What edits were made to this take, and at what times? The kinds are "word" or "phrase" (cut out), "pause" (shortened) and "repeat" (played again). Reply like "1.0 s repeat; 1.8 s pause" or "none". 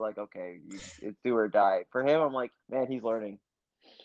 2.6 s pause